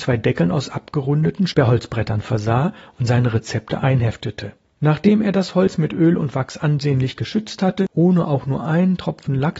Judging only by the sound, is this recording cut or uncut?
uncut